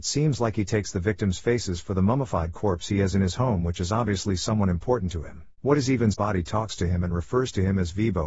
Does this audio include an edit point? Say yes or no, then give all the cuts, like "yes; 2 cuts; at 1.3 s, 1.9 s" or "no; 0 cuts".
yes; 2 cuts; at 5.6 s, 6.1 s